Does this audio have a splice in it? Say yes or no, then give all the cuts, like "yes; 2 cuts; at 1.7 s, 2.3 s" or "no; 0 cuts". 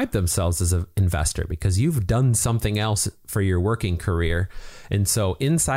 no; 0 cuts